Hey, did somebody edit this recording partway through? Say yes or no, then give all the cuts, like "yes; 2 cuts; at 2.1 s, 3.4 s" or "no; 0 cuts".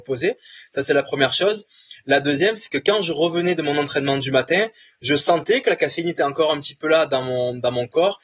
no; 0 cuts